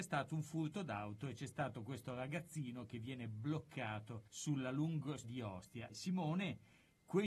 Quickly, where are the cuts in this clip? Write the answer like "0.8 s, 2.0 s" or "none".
4.3 s, 5.2 s, 5.9 s